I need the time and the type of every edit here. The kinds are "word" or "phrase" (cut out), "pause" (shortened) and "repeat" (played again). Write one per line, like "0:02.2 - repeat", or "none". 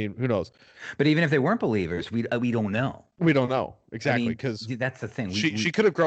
none